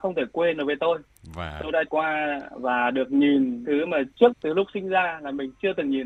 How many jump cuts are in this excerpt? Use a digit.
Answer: 3